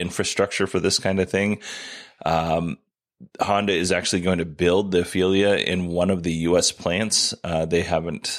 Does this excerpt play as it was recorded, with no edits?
yes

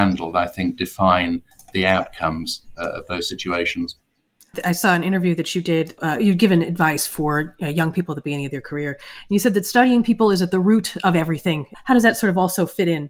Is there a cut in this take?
no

